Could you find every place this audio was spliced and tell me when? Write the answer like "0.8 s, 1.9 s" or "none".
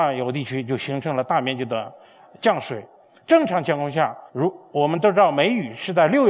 4.3 s